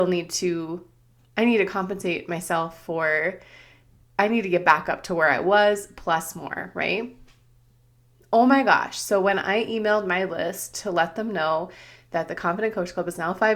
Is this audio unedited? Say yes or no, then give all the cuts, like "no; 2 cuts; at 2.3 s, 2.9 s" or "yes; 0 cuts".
yes; 0 cuts